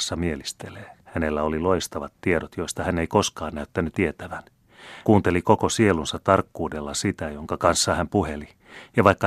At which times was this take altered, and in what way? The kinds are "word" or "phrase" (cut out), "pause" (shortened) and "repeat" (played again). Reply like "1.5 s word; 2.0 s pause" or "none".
1.0 s pause; 3.9 s word; 5.0 s word